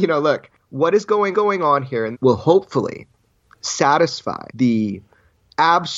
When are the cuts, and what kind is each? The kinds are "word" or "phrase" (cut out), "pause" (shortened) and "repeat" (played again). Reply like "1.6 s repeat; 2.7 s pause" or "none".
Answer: 1.3 s repeat; 2.1 s phrase; 4.5 s pause

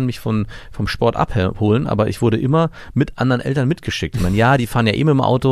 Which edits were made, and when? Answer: none

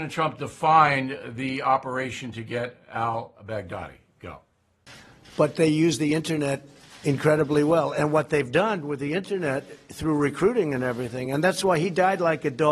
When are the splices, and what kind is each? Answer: none

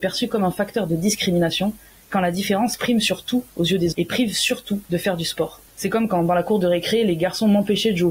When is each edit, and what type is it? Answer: 3.9 s word; 4.9 s pause; 5.7 s pause

